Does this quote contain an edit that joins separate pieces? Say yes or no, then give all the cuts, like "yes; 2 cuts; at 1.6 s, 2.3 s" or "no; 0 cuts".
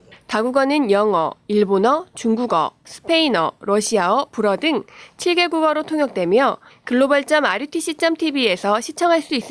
yes; 1 cut; at 2.9 s